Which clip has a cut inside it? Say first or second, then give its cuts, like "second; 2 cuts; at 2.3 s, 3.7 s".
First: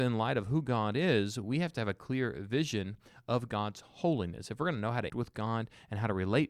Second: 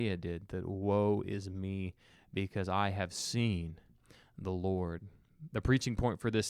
first; 1 cut; at 5.1 s